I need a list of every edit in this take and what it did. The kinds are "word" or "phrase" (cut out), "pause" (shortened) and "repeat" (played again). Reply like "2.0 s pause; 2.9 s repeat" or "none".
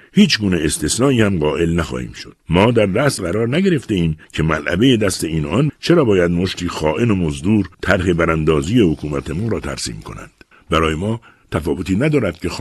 2.4 s pause; 3.2 s word; 4.2 s pause; 5.7 s word; 7.7 s pause; 10.5 s pause